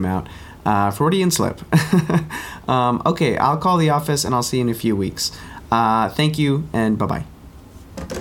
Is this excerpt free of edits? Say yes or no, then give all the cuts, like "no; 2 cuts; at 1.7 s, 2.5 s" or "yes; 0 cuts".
yes; 0 cuts